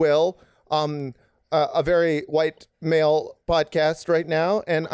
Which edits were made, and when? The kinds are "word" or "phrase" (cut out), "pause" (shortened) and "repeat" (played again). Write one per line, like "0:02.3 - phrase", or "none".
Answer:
none

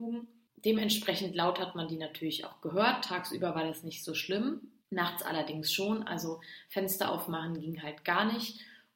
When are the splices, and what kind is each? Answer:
0:04.8 - pause

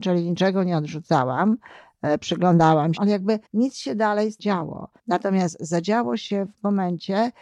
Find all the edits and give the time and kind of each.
0:03.0 - phrase
0:03.5 - pause
0:04.4 - phrase
0:05.0 - pause

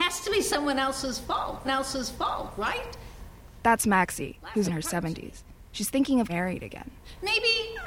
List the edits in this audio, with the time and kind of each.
0:01.6 - repeat
0:04.6 - word
0:06.3 - word

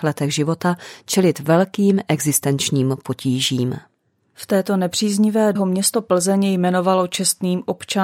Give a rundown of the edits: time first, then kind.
0:05.6 - word

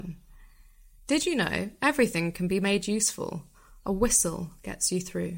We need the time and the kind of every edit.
none

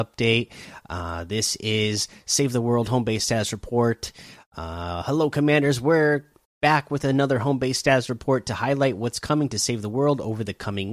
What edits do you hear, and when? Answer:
0:06.4 - pause

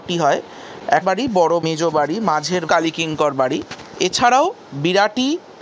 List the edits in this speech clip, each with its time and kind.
0:01.0 - phrase
0:01.6 - word
0:02.7 - phrase

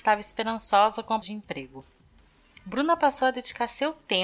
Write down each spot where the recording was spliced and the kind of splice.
0:01.2 - word

